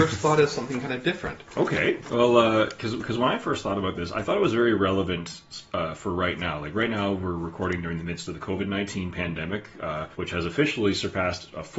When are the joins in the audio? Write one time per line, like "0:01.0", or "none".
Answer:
0:10.1

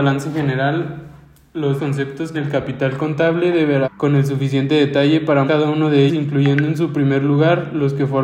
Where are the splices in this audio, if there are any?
0:01.8
0:02.3
0:03.8
0:05.5
0:06.1

